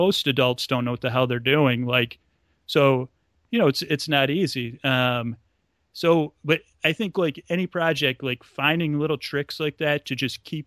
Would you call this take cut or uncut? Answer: uncut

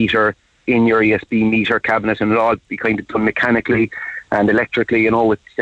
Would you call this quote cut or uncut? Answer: uncut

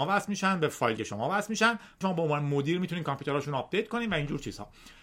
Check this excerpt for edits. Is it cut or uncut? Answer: cut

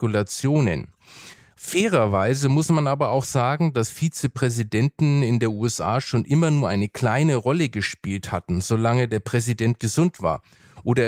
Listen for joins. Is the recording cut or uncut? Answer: uncut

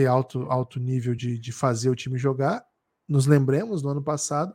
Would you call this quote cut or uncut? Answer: uncut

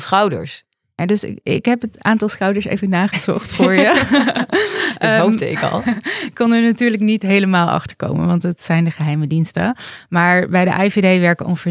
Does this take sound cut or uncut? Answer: uncut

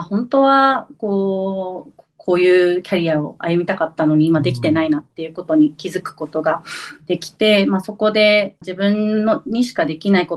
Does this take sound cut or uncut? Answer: cut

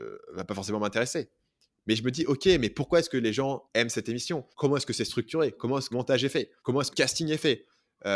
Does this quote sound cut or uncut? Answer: cut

